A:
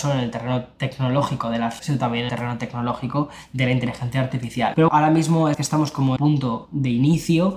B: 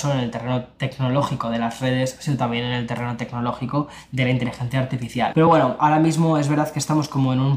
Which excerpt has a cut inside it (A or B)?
A